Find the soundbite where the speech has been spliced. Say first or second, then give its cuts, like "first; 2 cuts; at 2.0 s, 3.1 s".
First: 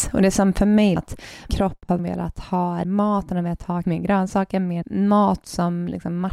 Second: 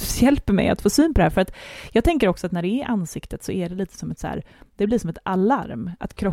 first; 6 cuts; at 1.0 s, 1.5 s, 2.0 s, 2.8 s, 3.8 s, 4.8 s